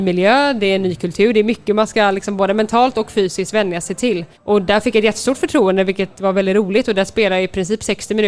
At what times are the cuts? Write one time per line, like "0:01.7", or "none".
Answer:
0:04.3